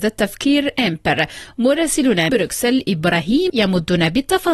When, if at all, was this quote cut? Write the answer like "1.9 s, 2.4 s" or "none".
2.3 s, 3.5 s